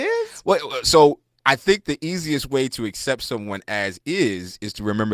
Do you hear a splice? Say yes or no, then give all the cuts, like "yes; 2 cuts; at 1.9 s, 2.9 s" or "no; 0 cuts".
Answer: no; 0 cuts